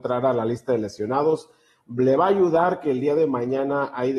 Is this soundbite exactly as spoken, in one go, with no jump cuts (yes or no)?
yes